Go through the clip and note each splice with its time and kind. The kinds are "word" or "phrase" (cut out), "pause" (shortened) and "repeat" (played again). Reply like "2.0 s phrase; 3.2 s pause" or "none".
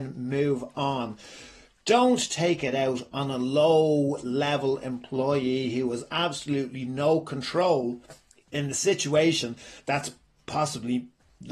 none